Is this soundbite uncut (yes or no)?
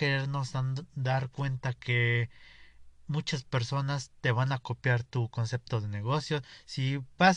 yes